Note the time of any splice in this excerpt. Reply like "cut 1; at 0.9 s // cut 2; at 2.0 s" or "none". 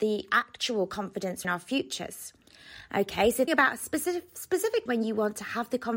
cut 1; at 1.4 s // cut 2; at 3.5 s // cut 3; at 4.9 s